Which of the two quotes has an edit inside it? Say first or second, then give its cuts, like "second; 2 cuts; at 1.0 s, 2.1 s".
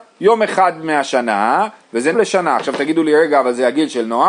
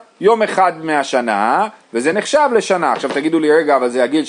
first; 1 cut; at 2.1 s